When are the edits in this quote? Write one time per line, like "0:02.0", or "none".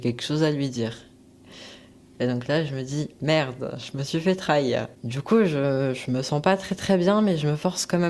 none

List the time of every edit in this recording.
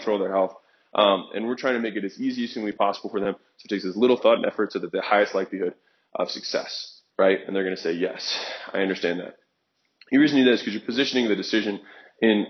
0:07.1

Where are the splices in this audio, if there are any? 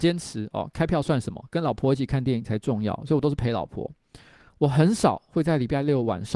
none

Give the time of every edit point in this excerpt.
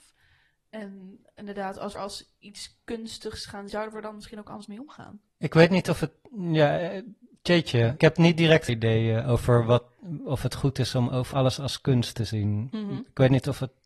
0:01.9
0:03.7
0:05.3
0:08.0
0:08.7
0:11.3

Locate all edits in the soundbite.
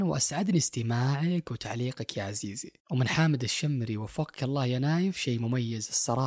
0:02.8

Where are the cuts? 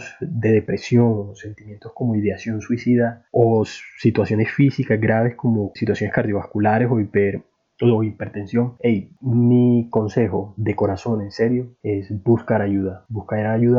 0:05.8

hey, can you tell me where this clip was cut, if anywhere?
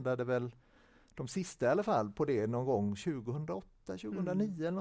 none

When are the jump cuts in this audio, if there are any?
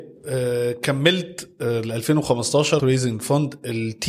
0:02.8

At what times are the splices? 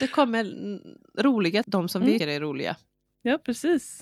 0:01.0
0:01.6
0:02.2

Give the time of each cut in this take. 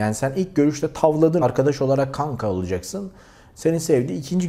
0:01.4

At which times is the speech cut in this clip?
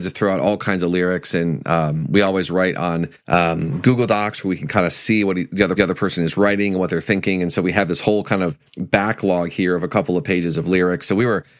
0:03.2
0:05.8
0:08.7

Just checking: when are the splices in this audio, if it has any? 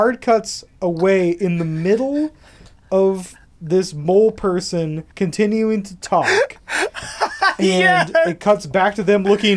0:05.1

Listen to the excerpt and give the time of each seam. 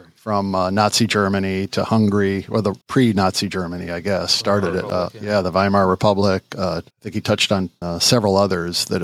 0:02.8
0:06.9
0:07.8

